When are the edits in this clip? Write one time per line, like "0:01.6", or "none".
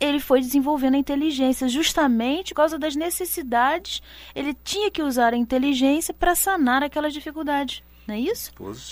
0:02.5